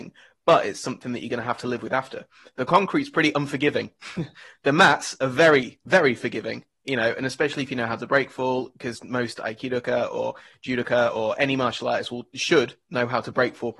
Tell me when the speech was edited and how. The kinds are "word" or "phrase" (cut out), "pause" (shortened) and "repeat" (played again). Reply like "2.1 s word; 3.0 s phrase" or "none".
none

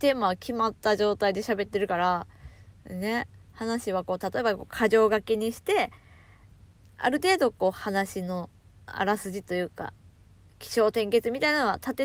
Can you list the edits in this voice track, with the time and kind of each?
none

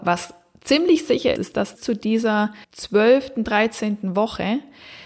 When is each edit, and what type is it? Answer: 1.4 s word; 1.7 s phrase; 2.6 s pause

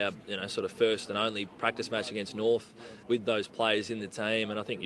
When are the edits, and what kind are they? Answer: 3.0 s word

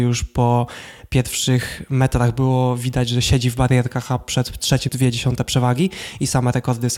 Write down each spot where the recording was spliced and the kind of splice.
4.9 s phrase

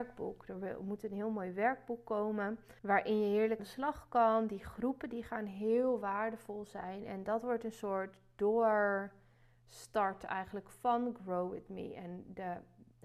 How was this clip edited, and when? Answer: 2.8 s pause; 3.6 s word

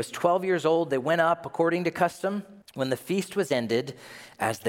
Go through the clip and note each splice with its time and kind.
2.6 s pause

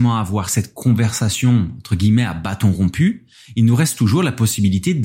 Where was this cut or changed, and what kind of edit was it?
none

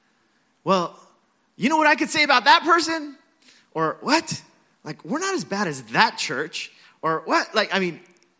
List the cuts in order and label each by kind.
none

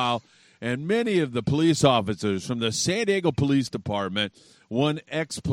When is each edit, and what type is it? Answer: none

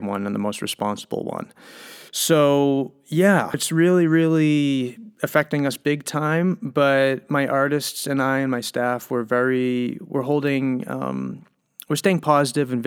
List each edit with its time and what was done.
2.1 s pause; 3.5 s word

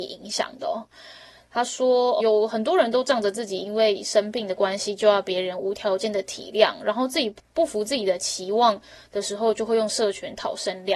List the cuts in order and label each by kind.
2.2 s word

